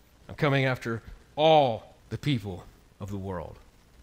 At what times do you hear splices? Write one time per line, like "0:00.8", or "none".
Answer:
0:02.0